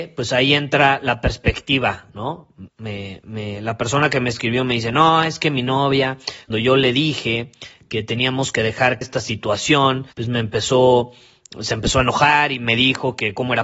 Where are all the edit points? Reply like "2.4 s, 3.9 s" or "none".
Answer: 2.7 s, 6.5 s, 9.0 s, 10.1 s